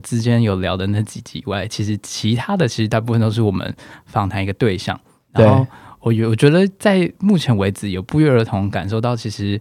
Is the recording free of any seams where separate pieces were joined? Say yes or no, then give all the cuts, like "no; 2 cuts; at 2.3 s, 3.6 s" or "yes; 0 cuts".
yes; 0 cuts